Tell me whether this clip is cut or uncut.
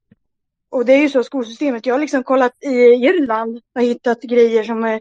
cut